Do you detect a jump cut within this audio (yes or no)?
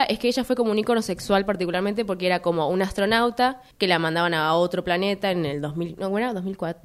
yes